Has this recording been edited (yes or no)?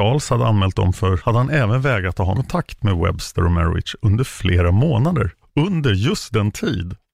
yes